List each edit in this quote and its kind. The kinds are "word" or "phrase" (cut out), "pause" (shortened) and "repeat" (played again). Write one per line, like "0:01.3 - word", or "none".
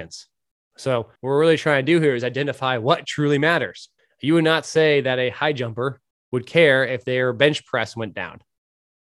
0:01.2 - pause
0:04.0 - pause
0:06.1 - pause